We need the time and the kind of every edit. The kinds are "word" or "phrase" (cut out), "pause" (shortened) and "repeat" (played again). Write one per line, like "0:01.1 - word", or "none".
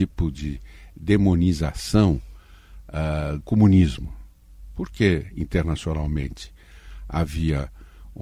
0:03.4 - word